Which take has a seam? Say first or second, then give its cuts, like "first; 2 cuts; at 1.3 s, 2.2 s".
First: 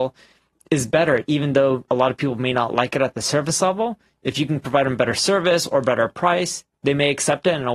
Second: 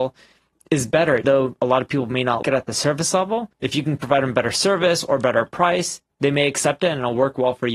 second; 3 cuts; at 1.2 s, 2.4 s, 3.5 s